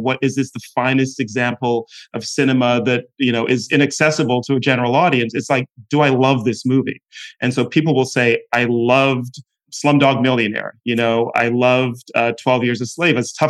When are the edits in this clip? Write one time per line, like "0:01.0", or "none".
none